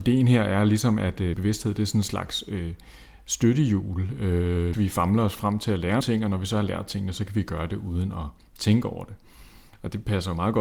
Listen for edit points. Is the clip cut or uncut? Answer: cut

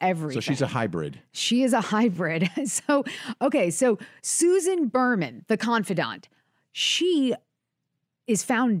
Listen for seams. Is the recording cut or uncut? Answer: uncut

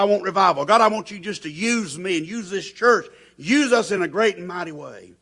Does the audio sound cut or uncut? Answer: uncut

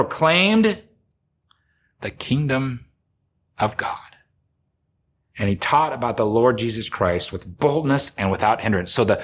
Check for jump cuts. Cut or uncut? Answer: uncut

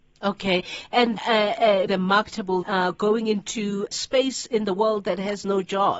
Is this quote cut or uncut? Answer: cut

